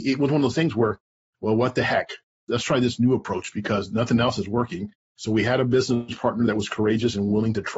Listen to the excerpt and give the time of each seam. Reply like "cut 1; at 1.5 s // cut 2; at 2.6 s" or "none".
cut 1; at 2.2 s